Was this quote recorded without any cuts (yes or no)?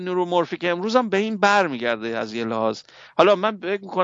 yes